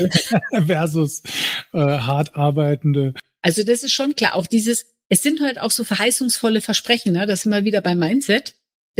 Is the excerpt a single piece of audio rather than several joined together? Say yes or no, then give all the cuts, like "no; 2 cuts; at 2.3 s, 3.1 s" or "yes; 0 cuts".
yes; 0 cuts